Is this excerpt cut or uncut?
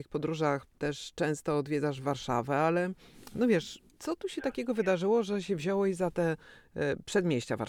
cut